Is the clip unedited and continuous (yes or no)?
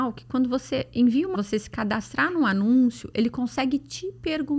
no